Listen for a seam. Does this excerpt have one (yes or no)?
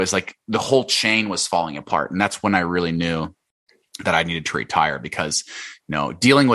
no